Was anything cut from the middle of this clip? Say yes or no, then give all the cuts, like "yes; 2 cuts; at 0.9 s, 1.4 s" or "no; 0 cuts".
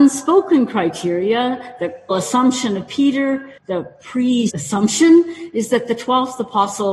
yes; 3 cuts; at 2.1 s, 3.6 s, 4.5 s